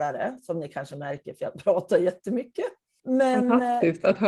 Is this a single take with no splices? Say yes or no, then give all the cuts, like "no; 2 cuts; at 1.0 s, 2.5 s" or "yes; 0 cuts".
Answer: yes; 0 cuts